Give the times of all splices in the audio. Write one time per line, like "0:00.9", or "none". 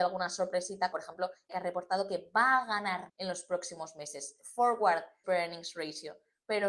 0:00.9
0:01.5
0:03.1
0:05.2